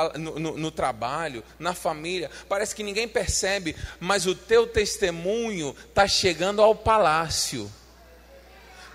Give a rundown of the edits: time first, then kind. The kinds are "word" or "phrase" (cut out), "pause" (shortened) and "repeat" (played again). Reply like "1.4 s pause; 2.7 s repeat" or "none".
none

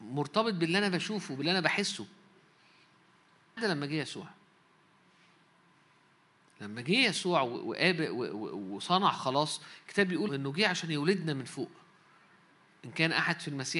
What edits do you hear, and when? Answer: 3.6 s word; 10.3 s word

